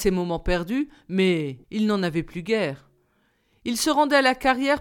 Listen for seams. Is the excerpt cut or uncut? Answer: cut